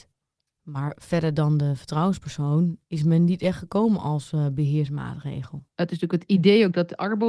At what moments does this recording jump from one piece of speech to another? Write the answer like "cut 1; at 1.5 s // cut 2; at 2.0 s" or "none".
cut 1; at 2.8 s // cut 2; at 5.7 s